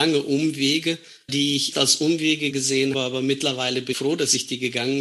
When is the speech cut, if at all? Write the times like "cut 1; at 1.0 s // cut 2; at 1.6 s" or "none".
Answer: cut 1; at 1.3 s // cut 2; at 1.7 s // cut 3; at 2.5 s // cut 4; at 2.9 s // cut 5; at 3.9 s